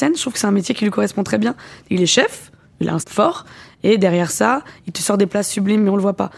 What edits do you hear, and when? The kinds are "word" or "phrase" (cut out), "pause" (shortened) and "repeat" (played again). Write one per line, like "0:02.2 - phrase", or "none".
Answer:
0:03.0 - word